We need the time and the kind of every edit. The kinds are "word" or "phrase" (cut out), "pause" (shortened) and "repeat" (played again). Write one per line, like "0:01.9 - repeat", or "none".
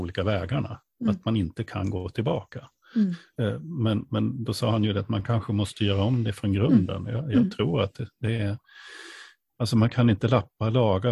none